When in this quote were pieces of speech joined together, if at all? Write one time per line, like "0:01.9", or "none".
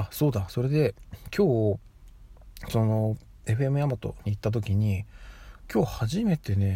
none